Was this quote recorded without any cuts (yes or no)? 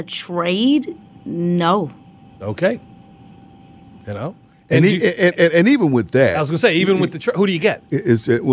yes